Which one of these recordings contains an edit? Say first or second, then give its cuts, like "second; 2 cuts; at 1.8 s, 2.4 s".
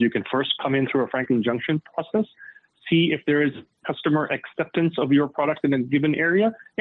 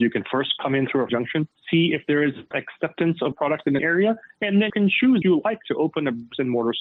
second; 7 cuts; at 1.1 s, 1.5 s, 2.5 s, 3.3 s, 3.8 s, 4.7 s, 5.2 s